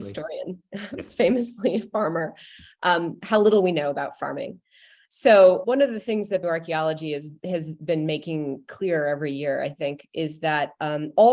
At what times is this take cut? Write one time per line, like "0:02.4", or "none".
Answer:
0:05.6
0:06.4

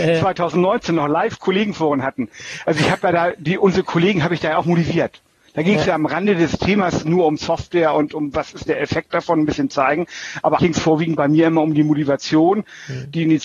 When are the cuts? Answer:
0:10.6

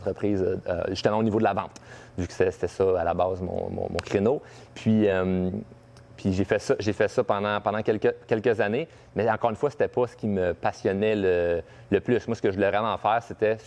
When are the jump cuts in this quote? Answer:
none

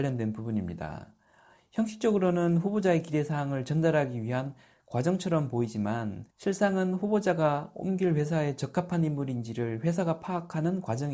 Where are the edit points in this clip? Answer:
0:06.3

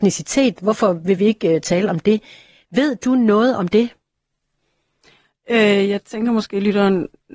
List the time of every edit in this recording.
none

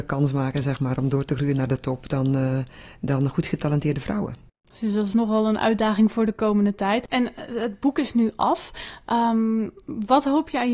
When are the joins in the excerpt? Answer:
none

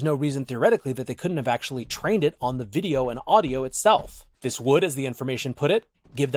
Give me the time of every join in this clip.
0:04.3

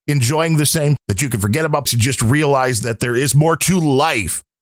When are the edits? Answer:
0:01.0
0:01.9

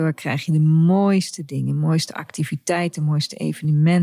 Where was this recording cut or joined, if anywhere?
none

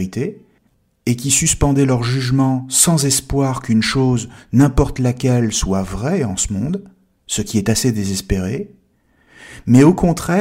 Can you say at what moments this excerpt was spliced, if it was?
none

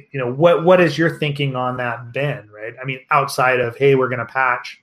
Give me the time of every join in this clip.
none

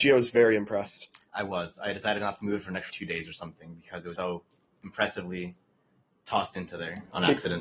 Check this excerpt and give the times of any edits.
0:02.9
0:04.2

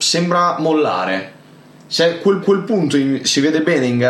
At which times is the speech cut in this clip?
0:02.4

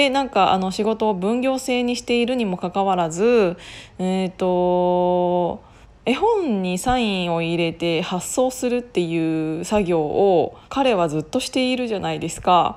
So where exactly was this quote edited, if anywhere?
0:05.8
0:10.6

